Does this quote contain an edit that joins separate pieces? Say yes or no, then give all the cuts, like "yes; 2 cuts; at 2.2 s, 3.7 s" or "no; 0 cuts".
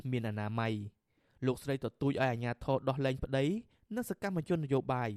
no; 0 cuts